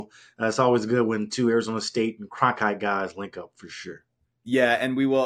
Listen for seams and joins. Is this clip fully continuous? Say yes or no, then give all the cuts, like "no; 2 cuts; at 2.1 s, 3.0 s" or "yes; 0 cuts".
yes; 0 cuts